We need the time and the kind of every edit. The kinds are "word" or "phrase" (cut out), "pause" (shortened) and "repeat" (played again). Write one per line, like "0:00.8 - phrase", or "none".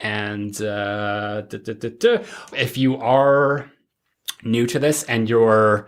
0:02.5 - word